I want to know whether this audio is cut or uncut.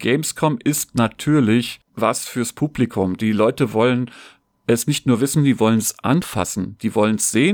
cut